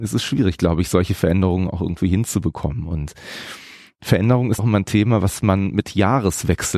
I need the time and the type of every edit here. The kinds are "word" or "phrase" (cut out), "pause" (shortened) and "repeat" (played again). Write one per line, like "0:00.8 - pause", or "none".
0:04.6 - word